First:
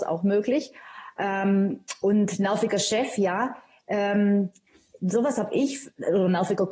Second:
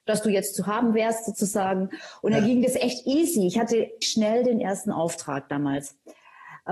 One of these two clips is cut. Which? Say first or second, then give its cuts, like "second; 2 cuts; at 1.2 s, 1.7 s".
second; 1 cut; at 4.0 s